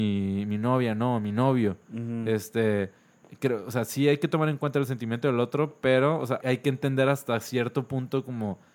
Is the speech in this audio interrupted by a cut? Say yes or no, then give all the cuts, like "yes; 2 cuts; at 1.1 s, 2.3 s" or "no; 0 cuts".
yes; 1 cut; at 6.4 s